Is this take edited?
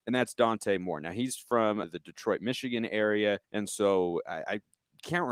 yes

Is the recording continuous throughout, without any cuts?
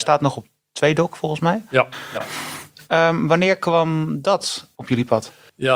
yes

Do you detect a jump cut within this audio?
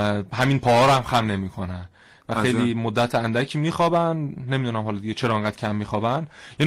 no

